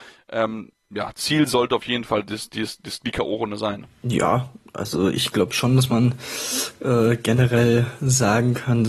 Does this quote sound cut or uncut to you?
uncut